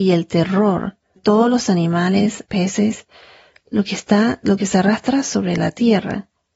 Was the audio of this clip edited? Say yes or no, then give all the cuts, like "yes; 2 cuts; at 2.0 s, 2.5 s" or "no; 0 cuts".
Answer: yes; 2 cuts; at 1.2 s, 2.5 s